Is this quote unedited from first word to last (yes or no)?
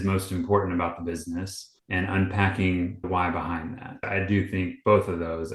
no